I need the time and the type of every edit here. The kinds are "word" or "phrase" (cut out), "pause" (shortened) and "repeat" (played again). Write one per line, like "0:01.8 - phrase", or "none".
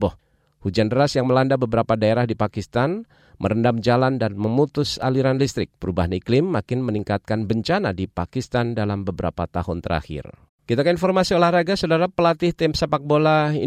0:05.8 - pause
0:10.5 - pause

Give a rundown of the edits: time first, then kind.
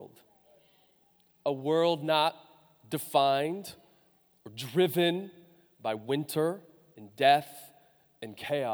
none

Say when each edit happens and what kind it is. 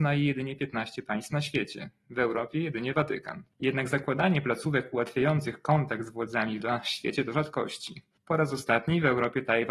0:06.6 - phrase

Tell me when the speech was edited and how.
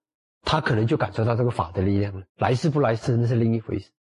0:02.3 - pause

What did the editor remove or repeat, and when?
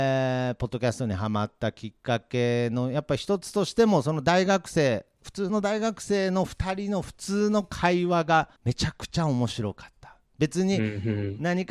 0:08.6 - pause

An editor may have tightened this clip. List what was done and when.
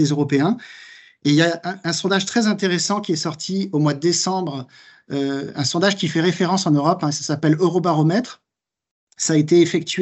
none

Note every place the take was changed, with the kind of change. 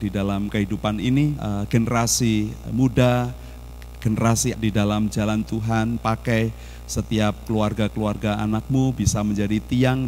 0:01.4 - phrase
0:02.7 - word
0:04.5 - word
0:06.0 - word

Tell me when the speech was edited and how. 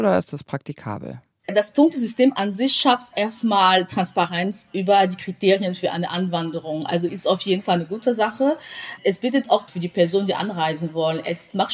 0:07.1 - word
0:09.7 - word

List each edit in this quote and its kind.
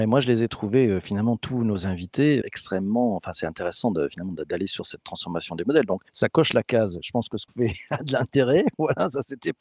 0:02.4 - word
0:06.1 - pause
0:07.5 - word

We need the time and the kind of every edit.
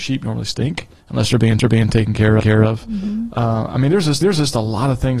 0:01.6 - repeat
0:02.4 - repeat
0:04.2 - repeat

